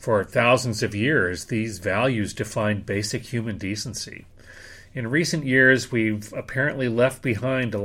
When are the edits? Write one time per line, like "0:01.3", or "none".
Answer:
none